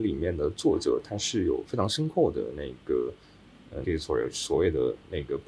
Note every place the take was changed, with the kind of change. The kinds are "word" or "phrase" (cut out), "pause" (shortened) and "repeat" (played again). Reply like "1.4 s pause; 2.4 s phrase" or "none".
3.8 s word